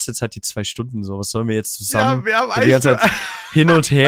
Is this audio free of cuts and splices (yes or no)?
yes